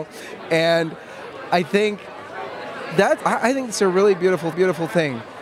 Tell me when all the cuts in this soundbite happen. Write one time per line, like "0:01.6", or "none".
0:03.2
0:04.5